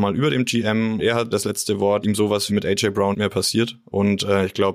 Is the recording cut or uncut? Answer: cut